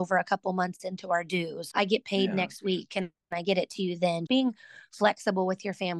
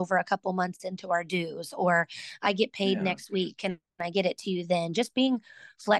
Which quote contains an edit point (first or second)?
first